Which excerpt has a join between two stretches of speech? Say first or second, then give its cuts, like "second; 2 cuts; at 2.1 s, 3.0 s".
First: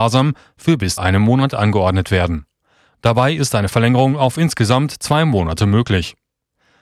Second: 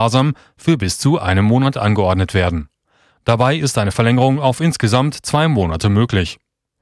first; 1 cut; at 1.0 s